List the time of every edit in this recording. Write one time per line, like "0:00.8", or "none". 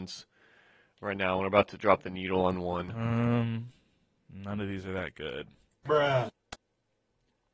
none